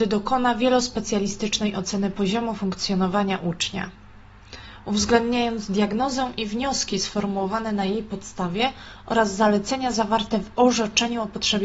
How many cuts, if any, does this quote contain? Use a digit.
0